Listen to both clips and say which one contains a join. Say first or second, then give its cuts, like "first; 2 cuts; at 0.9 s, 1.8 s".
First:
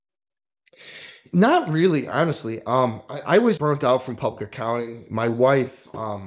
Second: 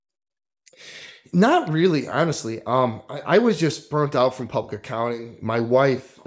first; 1 cut; at 3.6 s